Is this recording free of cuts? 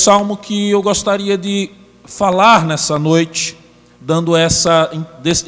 yes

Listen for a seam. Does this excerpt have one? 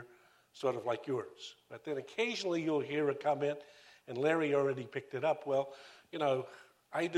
no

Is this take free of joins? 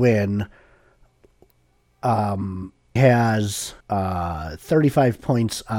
no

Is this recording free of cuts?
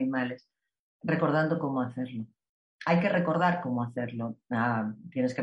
yes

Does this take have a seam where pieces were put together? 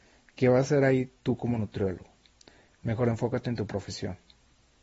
no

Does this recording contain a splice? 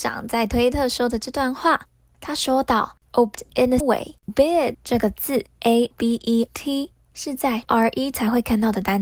yes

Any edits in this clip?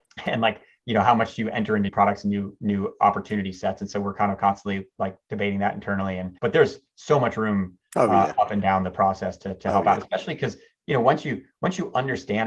yes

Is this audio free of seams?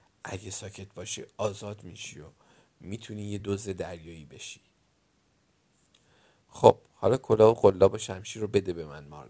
yes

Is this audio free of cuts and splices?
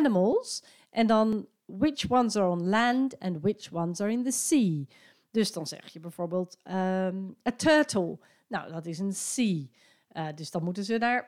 yes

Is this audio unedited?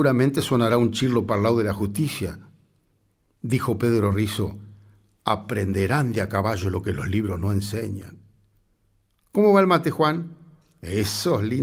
yes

